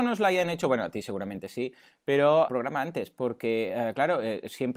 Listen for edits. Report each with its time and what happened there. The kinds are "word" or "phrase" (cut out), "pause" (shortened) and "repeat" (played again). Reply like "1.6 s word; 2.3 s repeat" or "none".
2.5 s word